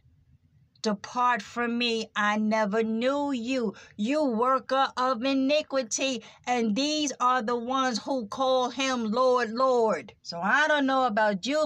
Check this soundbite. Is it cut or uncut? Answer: cut